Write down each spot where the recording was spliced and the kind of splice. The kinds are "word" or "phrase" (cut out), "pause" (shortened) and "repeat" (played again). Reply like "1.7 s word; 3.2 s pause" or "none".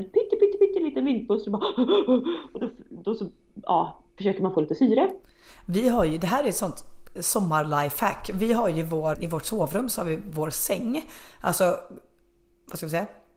4.2 s word; 7.2 s word; 9.1 s word